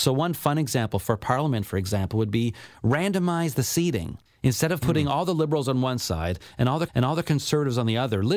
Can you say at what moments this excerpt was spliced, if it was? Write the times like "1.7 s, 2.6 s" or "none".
4.3 s, 6.9 s